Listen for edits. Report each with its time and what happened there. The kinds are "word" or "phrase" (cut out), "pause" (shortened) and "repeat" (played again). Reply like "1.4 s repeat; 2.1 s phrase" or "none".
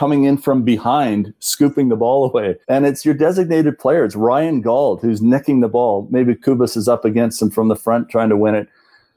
2.6 s pause